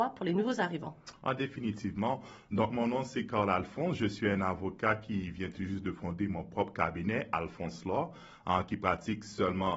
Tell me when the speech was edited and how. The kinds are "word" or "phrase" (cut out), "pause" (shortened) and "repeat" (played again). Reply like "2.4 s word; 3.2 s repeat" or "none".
none